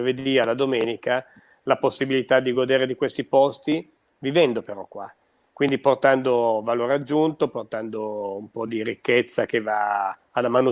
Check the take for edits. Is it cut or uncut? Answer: uncut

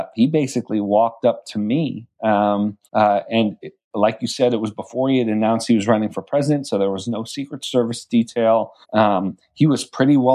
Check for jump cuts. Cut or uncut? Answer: cut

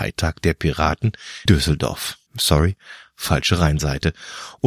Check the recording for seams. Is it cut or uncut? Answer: cut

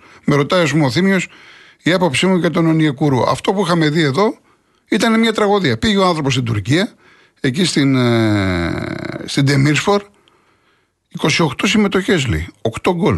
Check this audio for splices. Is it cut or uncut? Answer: uncut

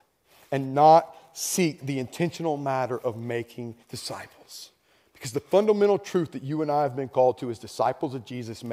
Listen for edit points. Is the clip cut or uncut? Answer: cut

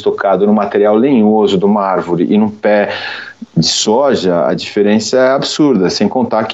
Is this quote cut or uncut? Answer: uncut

